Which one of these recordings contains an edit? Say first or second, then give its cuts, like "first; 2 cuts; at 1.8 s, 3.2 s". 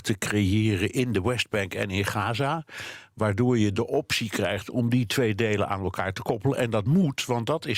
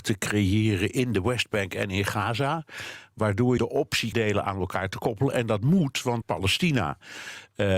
second; 3 cuts; at 3.6 s, 4.1 s, 6.2 s